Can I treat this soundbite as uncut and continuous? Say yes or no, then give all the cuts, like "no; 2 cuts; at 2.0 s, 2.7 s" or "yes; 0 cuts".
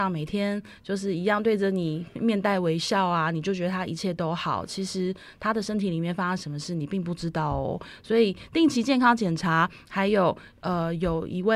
yes; 0 cuts